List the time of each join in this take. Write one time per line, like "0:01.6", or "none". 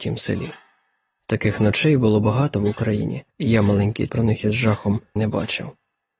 0:03.3
0:04.1
0:05.2